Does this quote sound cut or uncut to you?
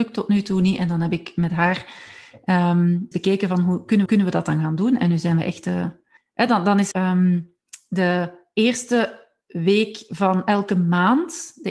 cut